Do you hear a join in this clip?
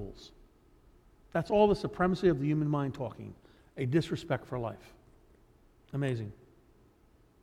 no; 0 cuts

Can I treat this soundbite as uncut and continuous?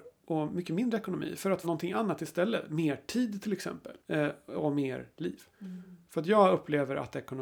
no; 3 cuts; at 1.6 s, 4.0 s, 5.5 s

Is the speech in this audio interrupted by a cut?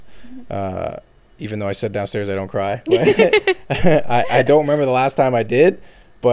no; 0 cuts

